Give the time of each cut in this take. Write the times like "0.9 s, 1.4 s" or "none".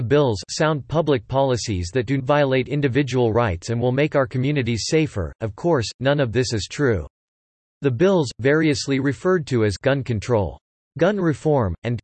2.2 s